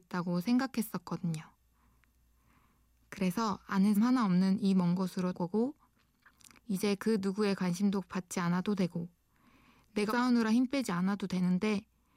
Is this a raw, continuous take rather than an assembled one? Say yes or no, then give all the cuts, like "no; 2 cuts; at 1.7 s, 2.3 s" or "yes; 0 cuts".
no; 3 cuts; at 3.9 s, 5.3 s, 10.1 s